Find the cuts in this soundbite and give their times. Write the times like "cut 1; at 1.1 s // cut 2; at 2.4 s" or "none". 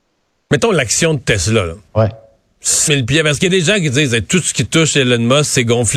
cut 1; at 1.9 s // cut 2; at 2.9 s